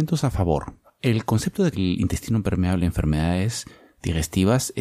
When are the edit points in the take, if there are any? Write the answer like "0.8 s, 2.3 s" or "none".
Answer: 1.7 s